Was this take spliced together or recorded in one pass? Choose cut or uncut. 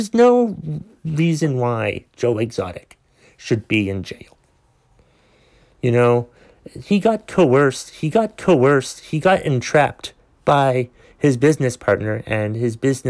cut